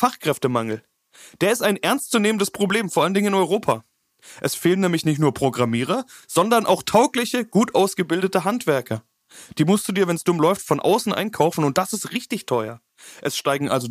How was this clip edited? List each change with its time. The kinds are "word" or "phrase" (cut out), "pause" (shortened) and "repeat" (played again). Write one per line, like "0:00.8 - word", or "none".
none